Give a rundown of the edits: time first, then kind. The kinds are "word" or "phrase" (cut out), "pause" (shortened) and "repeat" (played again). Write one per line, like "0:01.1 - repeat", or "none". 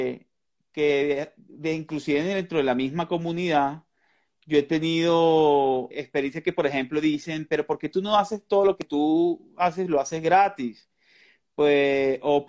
0:05.9 - word